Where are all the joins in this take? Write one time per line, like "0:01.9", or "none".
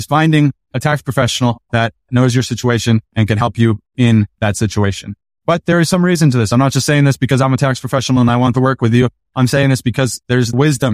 none